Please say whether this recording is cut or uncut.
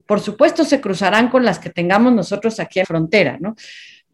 cut